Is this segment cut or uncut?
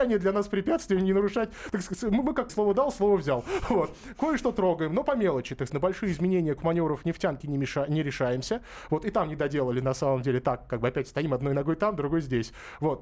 cut